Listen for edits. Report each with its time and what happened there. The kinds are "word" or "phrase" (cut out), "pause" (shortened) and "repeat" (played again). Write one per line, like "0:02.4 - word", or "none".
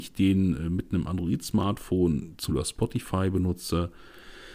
0:02.5 - word